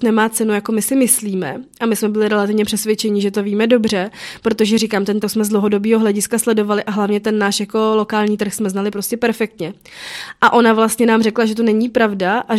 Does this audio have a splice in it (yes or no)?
yes